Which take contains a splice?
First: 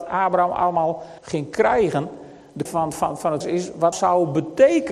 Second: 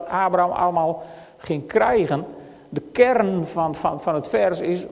first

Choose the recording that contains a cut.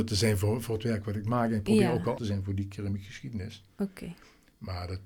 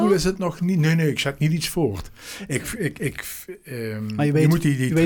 first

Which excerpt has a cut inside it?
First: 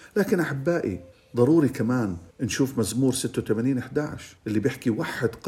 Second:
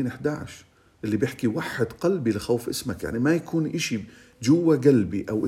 first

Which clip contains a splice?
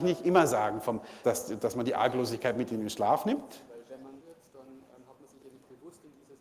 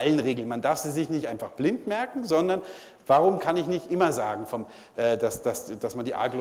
first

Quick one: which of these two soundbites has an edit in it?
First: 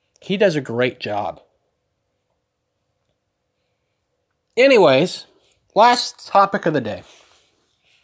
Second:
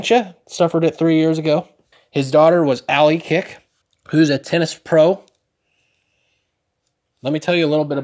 second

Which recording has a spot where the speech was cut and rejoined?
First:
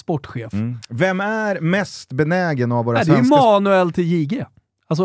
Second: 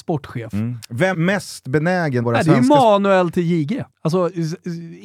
second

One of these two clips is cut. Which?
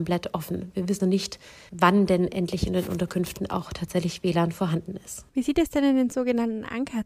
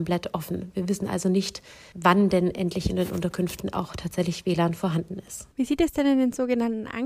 first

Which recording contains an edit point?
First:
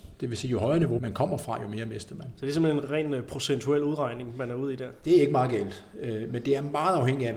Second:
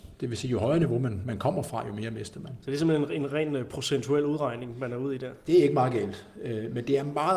first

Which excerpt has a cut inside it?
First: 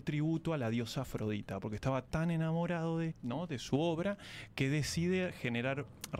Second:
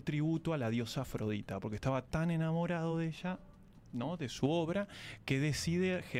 first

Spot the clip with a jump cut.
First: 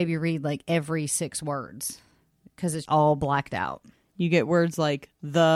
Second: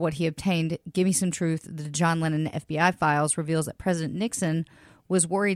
first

